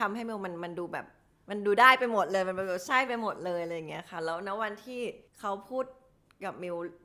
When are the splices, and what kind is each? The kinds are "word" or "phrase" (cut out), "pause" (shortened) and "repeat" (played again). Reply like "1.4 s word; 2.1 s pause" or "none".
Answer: 5.3 s pause